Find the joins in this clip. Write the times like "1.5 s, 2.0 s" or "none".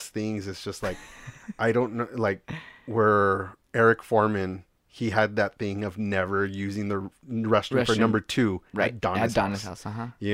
3.6 s, 4.7 s